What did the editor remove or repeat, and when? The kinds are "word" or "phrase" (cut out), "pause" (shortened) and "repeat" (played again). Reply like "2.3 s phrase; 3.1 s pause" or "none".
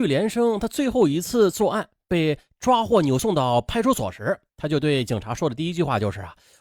4.5 s pause

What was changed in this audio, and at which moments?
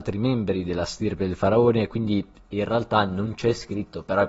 none

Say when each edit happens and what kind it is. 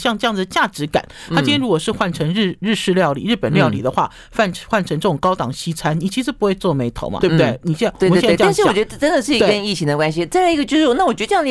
7.2 s word

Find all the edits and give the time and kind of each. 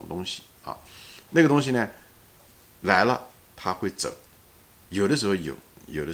none

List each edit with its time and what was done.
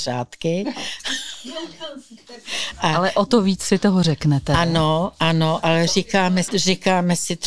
6.4 s word

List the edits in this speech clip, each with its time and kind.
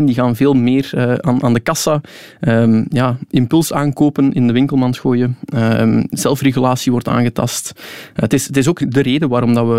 8.8 s word

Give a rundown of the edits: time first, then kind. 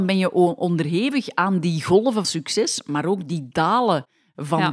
2.2 s word

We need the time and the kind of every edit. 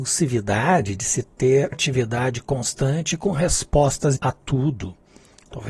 1.7 s word; 4.2 s word

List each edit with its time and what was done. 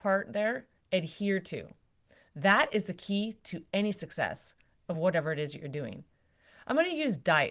none

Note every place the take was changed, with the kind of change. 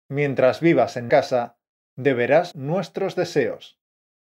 1.1 s word; 2.5 s word

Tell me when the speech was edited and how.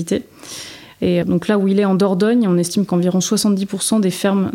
1.2 s word

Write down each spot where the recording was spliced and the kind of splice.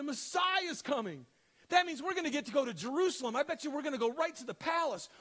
none

